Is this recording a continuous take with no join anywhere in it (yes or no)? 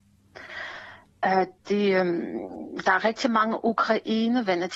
yes